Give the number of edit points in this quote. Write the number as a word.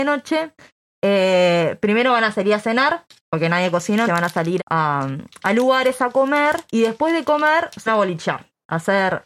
four